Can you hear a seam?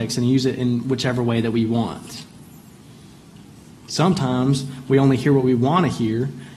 no; 0 cuts

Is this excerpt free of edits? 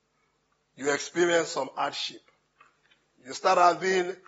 yes; 0 cuts

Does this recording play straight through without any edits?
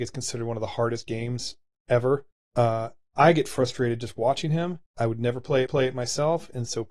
no; 3 cuts; at 2.3 s, 4.9 s, 5.7 s

